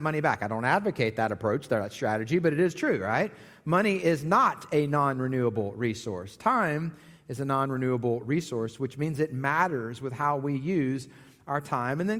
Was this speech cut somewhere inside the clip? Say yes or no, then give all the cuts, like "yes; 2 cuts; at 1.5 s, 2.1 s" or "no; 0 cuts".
no; 0 cuts